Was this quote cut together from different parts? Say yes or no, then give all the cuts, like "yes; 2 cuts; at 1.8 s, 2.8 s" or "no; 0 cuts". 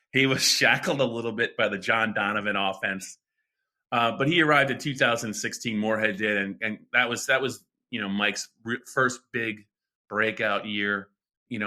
no; 0 cuts